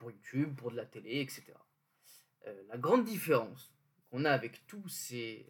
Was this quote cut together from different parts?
no; 0 cuts

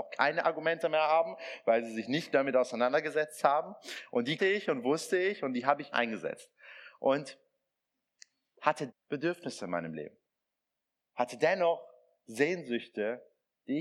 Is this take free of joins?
no; 4 cuts; at 2.3 s, 4.4 s, 5.9 s, 8.9 s

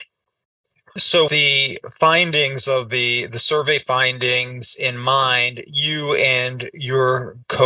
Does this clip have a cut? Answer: yes; 1 cut; at 1.3 s

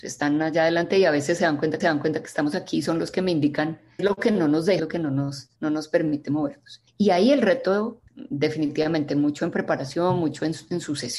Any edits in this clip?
yes; 6 cuts; at 1.8 s, 4.0 s, 4.8 s, 5.6 s, 6.9 s, 8.1 s

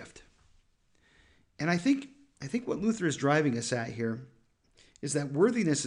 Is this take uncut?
yes; 0 cuts

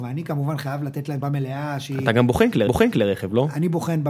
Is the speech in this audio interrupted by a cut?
yes; 2 cuts; at 1.2 s, 2.7 s

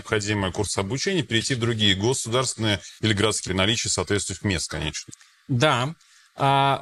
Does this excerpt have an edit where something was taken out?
yes; 2 cuts; at 3.0 s, 3.5 s

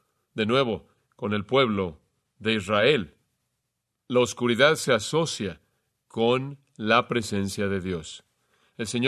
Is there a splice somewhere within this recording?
no; 0 cuts

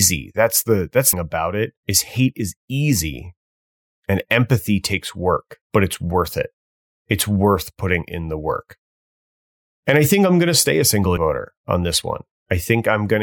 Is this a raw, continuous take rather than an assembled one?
no; 4 cuts; at 1.1 s, 1.8 s, 5.6 s, 11.2 s

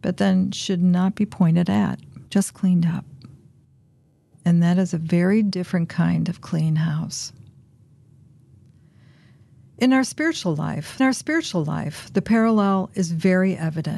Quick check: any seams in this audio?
yes; 2 cuts; at 2.3 s, 11.0 s

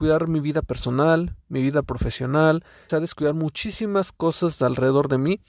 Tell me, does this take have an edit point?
yes; 1 cut; at 2.9 s

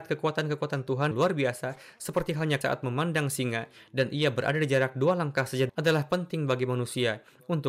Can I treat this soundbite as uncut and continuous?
no; 3 cuts; at 1.1 s, 2.6 s, 5.7 s

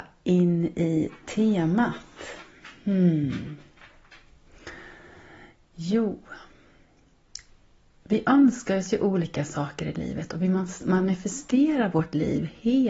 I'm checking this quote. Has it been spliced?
no; 0 cuts

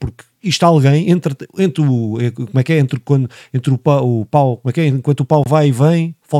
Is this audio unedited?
yes; 0 cuts

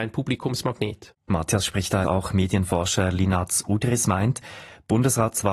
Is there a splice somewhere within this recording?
yes; 2 cuts; at 1.2 s, 2.0 s

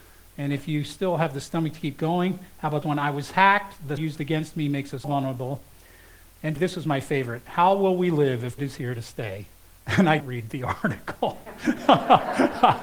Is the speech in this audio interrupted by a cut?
yes; 6 cuts; at 2.8 s, 4.0 s, 5.0 s, 6.6 s, 8.6 s, 10.2 s

